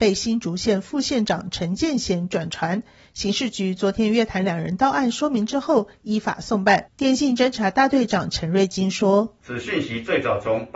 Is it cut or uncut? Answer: uncut